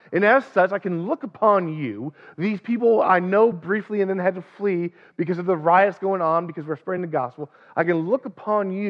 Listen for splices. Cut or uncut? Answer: uncut